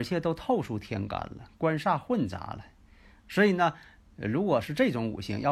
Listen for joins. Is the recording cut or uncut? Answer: uncut